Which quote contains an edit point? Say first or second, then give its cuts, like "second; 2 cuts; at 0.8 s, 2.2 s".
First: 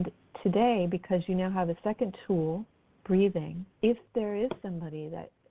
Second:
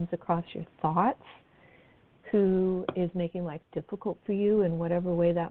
first; 1 cut; at 3.8 s